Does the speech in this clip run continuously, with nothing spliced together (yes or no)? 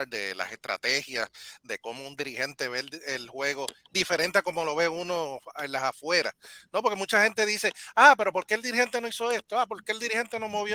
yes